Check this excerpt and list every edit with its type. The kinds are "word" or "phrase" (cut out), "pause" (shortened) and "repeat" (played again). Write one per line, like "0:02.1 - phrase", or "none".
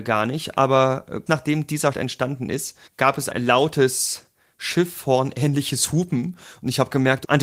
0:01.3 - word
0:01.9 - word
0:02.9 - pause
0:03.3 - word